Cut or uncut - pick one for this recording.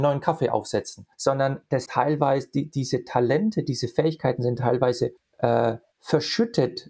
cut